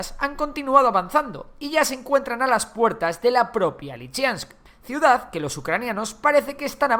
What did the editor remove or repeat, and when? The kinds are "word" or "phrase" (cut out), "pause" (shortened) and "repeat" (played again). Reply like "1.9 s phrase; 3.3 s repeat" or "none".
4.6 s pause